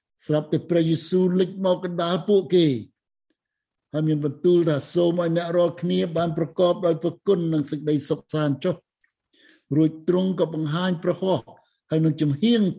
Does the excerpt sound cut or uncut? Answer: uncut